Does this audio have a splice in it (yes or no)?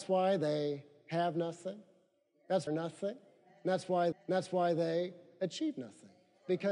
yes